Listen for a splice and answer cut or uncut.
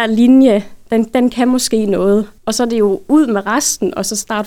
cut